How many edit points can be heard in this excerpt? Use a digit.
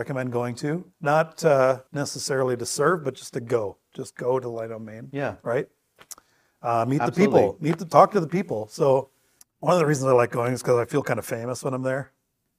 3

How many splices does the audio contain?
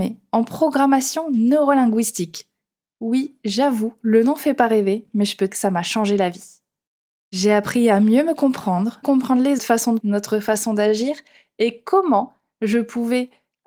4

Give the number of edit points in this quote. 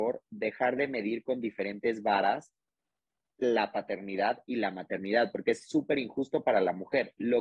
0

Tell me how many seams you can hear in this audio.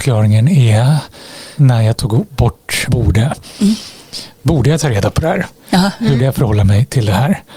3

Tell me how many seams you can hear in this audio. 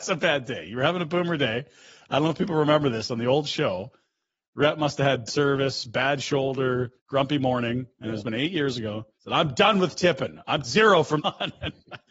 6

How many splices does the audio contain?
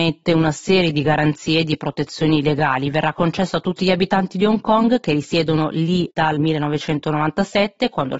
0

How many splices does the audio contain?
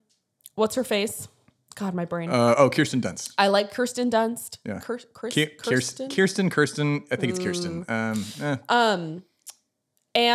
0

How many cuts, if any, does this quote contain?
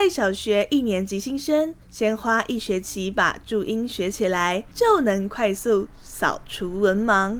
2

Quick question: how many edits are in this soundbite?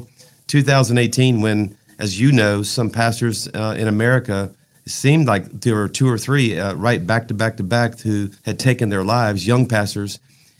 1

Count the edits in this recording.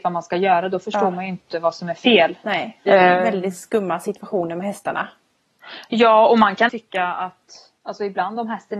3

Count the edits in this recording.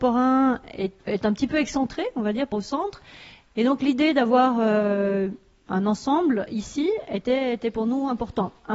2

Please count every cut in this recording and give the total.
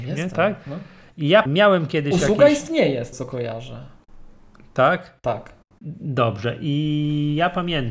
2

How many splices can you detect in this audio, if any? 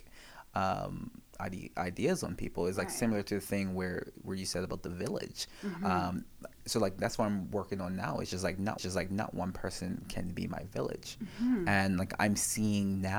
1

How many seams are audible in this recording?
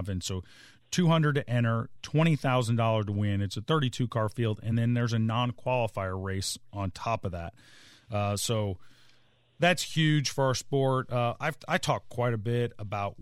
0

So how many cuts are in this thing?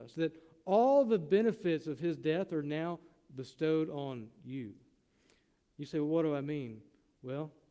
0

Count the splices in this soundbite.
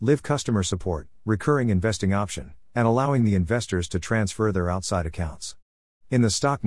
0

